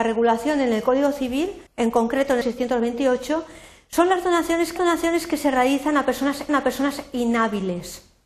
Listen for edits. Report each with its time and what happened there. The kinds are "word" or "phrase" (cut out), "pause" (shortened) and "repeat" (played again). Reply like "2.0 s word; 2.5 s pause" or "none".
1.7 s pause; 2.4 s word; 4.8 s repeat; 6.5 s repeat